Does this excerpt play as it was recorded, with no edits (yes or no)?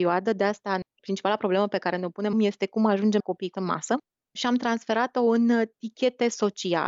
no